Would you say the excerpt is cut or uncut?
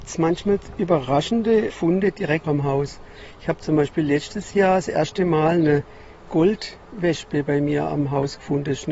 cut